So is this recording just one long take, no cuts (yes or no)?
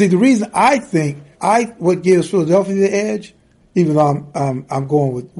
no